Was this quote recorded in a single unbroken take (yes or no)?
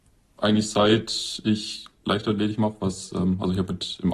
yes